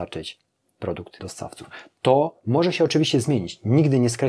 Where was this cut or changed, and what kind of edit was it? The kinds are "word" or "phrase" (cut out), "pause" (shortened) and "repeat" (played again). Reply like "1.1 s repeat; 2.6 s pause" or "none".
1.2 s phrase